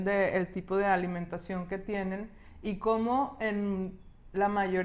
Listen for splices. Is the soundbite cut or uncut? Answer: uncut